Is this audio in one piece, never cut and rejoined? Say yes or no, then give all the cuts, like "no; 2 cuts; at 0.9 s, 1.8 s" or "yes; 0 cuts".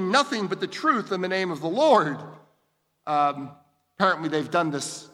yes; 0 cuts